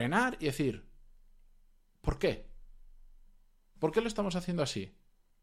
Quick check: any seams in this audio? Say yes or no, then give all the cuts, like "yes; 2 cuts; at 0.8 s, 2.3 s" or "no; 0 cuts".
no; 0 cuts